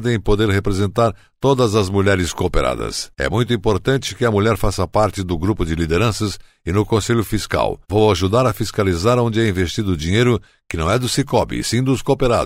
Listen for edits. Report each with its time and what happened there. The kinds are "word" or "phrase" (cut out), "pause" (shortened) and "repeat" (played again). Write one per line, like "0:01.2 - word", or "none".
none